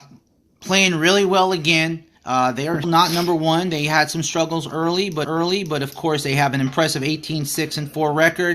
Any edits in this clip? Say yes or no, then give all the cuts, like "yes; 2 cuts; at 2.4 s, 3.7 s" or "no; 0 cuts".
yes; 3 cuts; at 2.1 s, 2.8 s, 5.2 s